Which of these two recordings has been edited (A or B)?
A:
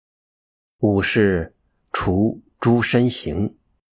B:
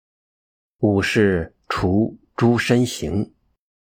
B